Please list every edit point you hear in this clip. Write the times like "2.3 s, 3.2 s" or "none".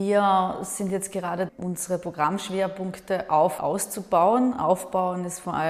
1.5 s, 3.6 s